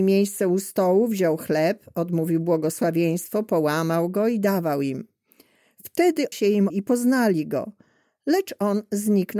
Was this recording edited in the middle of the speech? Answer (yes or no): yes